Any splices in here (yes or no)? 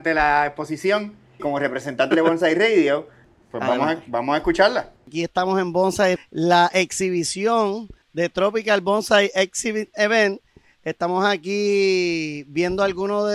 yes